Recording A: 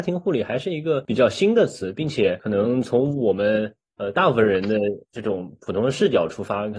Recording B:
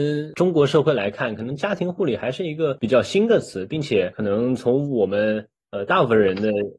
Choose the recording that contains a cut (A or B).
A